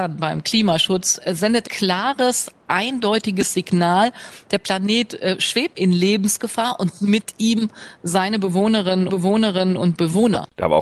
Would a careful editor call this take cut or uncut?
cut